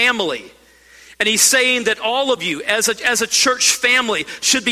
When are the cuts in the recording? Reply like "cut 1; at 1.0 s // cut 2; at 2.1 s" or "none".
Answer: none